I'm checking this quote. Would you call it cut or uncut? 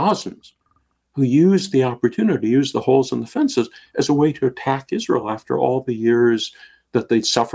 uncut